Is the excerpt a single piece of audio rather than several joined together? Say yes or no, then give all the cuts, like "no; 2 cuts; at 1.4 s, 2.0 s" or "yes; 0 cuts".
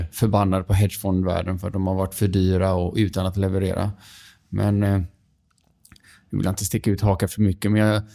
yes; 0 cuts